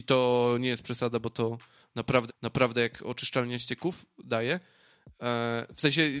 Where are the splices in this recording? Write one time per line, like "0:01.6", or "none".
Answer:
0:02.3